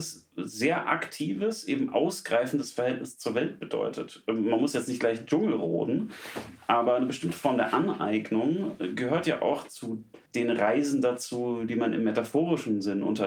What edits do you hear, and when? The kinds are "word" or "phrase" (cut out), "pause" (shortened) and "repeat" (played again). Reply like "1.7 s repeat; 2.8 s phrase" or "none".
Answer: 10.3 s pause